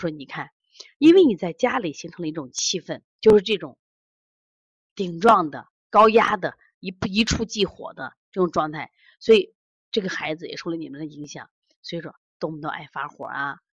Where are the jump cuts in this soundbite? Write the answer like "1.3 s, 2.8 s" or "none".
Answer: 3.1 s